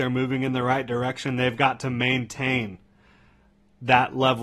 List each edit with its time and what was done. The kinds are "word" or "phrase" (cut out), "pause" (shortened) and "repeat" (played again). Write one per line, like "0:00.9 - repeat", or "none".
none

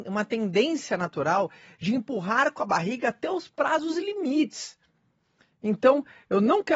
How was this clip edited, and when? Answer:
none

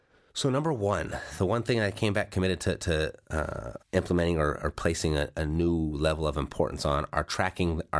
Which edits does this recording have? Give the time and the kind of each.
0:03.8 - pause

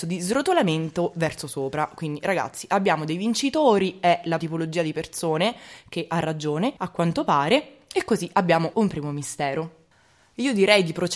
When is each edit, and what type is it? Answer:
0:04.4 - word
0:06.8 - pause
0:08.7 - word

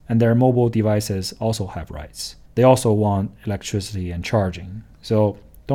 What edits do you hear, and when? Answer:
0:02.5 - pause

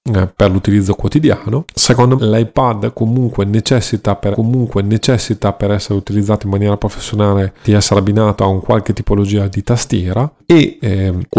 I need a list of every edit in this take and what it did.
0:02.2 - word
0:04.3 - repeat
0:07.6 - word

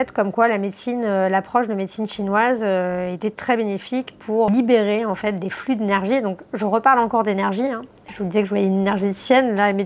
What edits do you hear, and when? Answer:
none

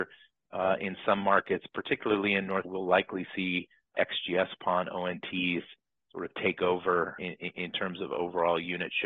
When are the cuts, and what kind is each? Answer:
0:02.6 - word
0:03.9 - word
0:07.2 - word

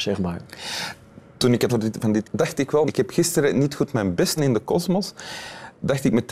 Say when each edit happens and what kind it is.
0:01.7 - phrase
0:02.2 - word
0:02.9 - word
0:04.4 - word

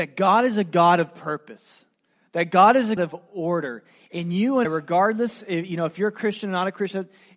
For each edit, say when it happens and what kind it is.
0:03.0 - word
0:04.6 - word

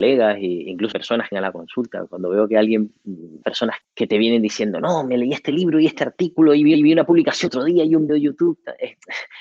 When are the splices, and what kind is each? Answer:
0:00.9 - word
0:01.3 - word
0:03.4 - word
0:03.8 - word
0:06.7 - repeat
0:07.5 - word
0:08.1 - word

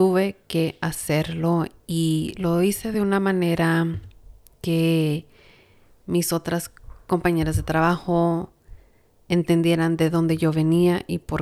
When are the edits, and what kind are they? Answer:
none

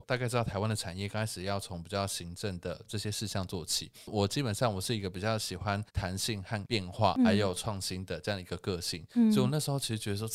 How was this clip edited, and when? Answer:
0:05.9 - pause

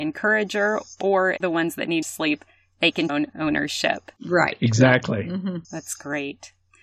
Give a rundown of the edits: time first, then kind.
0:01.4 - word
0:02.0 - word
0:03.1 - phrase
0:04.2 - pause
0:05.6 - pause

